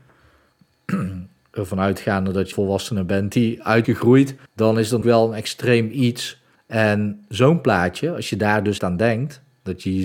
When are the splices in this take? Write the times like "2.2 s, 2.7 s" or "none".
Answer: 2.5 s, 3.8 s, 4.5 s, 5.0 s, 6.6 s, 8.8 s